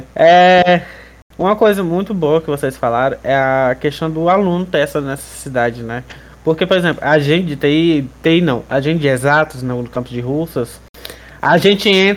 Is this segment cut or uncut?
uncut